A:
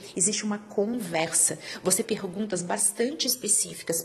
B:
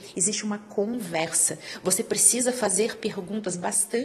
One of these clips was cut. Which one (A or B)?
A